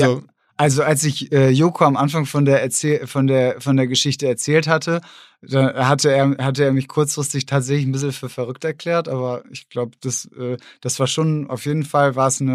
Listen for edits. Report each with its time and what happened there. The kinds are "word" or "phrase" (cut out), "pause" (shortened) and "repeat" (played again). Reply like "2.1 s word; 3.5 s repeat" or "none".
none